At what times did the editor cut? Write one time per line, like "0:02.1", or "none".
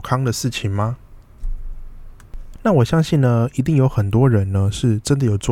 none